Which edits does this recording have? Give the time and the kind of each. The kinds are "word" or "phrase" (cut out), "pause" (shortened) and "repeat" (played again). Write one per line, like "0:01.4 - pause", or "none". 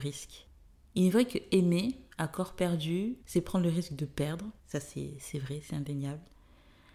0:02.1 - pause
0:03.2 - pause
0:04.6 - pause